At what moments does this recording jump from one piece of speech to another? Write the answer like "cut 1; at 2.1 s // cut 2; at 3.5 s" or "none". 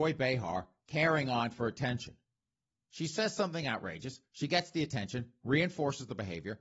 none